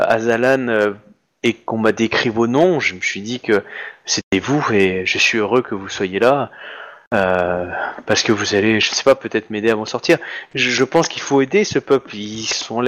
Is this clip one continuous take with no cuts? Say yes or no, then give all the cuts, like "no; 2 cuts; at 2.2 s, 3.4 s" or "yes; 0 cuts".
yes; 0 cuts